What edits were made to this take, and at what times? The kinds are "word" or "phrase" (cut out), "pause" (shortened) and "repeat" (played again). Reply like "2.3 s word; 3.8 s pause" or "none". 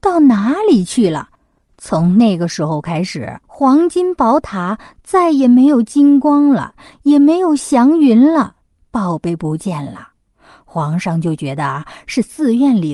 3.4 s pause